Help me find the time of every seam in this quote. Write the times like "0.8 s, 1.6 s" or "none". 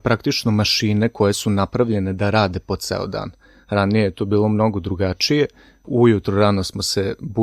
none